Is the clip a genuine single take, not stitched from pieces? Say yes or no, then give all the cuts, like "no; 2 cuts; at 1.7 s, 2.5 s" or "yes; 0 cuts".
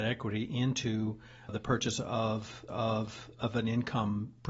no; 2 cuts; at 1.5 s, 2.7 s